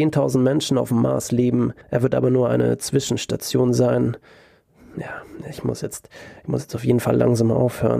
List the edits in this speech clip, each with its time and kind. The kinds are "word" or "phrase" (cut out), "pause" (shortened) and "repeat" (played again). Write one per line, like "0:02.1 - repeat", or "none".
0:01.8 - pause